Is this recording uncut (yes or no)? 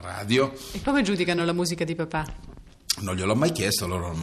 yes